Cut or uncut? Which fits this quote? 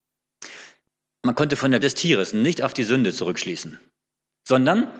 cut